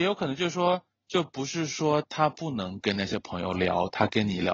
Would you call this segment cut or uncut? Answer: cut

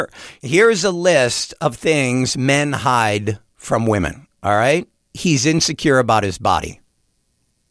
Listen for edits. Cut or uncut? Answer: cut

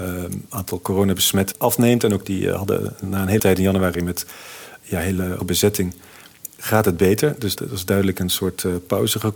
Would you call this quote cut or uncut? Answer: cut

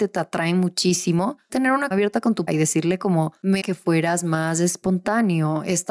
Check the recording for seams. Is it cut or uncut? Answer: cut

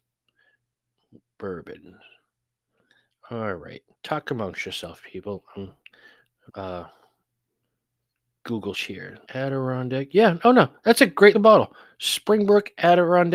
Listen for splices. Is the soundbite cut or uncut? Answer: cut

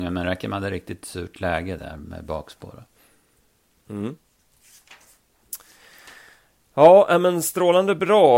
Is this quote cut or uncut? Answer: uncut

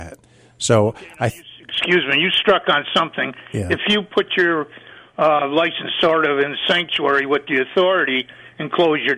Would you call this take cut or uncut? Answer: uncut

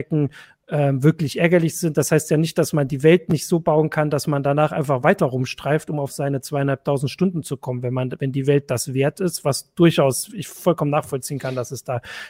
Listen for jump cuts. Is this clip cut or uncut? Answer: uncut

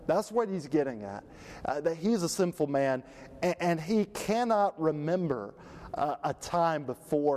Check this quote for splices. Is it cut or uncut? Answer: uncut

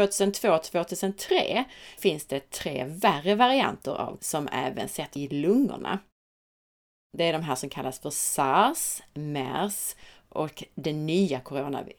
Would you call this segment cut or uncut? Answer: cut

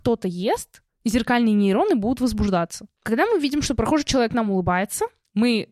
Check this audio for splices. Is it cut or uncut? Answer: uncut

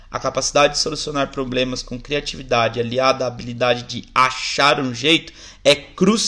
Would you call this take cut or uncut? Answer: uncut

